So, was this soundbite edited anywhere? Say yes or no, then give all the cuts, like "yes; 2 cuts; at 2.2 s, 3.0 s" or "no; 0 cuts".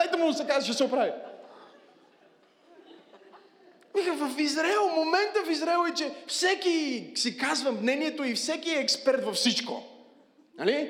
no; 0 cuts